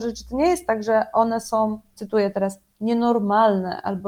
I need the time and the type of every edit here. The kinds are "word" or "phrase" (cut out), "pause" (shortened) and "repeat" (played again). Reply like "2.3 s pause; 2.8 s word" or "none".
none